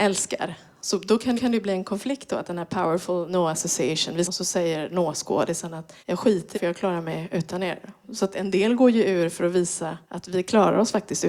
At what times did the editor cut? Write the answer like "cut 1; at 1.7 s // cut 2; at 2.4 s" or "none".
cut 1; at 1.4 s // cut 2; at 4.3 s // cut 3; at 6.0 s // cut 4; at 6.5 s // cut 5; at 10.0 s